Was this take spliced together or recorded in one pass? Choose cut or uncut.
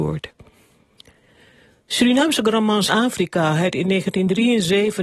cut